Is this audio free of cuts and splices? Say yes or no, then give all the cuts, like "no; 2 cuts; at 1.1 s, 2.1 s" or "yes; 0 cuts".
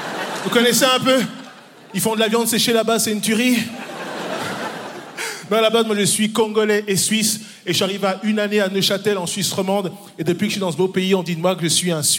yes; 0 cuts